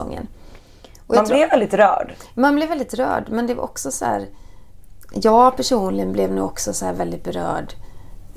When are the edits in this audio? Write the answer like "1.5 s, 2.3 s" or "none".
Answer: none